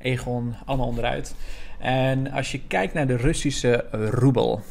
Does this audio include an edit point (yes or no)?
no